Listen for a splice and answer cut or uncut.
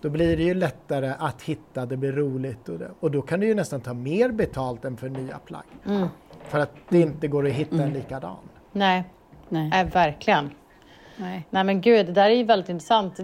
uncut